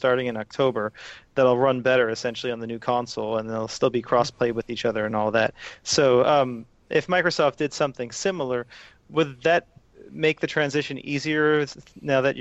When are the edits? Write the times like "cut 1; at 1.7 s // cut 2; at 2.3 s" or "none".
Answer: cut 1; at 9.9 s